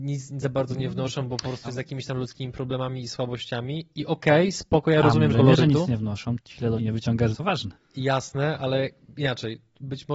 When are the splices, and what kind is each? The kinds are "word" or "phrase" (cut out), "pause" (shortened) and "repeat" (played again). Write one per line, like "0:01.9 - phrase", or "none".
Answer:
0:01.6 - word
0:05.3 - phrase
0:06.4 - word
0:06.8 - phrase
0:07.3 - phrase
0:07.8 - pause